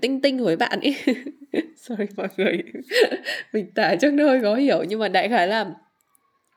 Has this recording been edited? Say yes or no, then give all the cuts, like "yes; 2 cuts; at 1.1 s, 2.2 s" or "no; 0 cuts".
no; 0 cuts